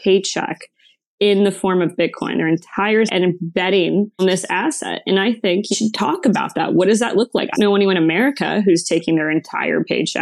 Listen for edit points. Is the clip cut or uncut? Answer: cut